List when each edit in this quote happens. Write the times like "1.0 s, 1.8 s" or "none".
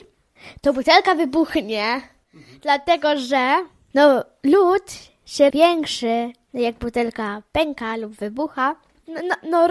5.5 s